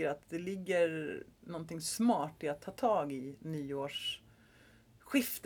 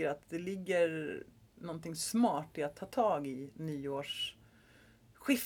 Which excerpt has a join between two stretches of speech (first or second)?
first